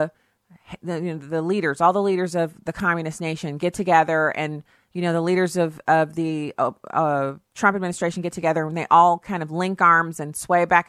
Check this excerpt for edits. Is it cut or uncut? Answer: uncut